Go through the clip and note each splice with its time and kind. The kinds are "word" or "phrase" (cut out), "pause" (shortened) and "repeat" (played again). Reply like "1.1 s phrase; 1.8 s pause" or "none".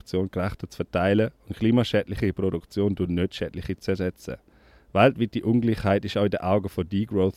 none